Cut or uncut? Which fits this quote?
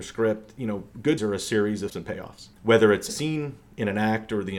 cut